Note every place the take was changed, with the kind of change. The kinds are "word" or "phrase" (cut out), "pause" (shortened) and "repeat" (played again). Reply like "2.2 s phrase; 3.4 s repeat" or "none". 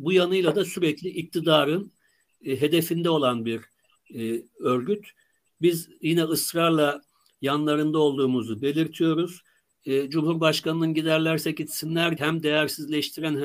12.2 s word